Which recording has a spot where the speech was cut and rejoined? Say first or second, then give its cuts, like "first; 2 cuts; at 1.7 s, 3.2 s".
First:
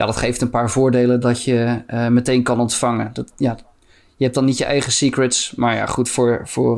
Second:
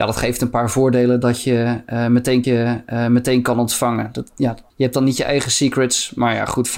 second; 2 cuts; at 2.4 s, 4.7 s